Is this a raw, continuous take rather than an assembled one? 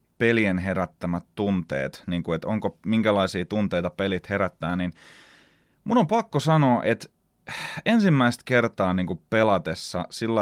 yes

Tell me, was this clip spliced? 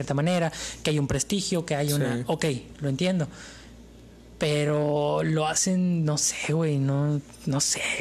no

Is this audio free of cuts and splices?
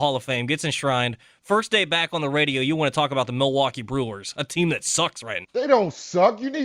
no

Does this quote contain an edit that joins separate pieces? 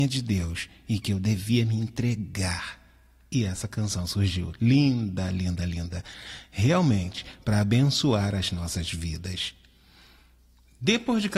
no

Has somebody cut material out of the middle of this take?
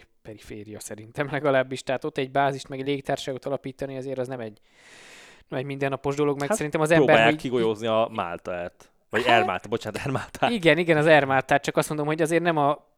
no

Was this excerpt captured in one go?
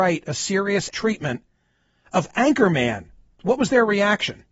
no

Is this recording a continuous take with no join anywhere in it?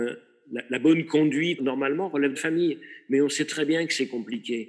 no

